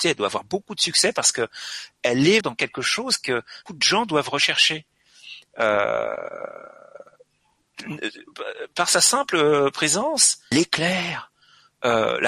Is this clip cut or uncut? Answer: cut